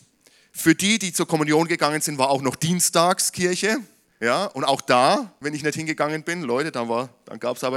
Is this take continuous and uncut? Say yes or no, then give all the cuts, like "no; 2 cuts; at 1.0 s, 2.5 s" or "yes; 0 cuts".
yes; 0 cuts